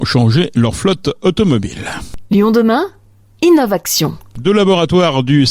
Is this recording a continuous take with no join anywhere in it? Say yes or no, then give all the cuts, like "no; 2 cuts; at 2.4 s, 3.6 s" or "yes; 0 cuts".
yes; 0 cuts